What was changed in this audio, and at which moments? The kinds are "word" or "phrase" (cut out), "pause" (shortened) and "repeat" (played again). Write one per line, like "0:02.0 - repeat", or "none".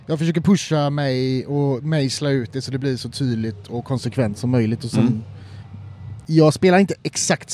none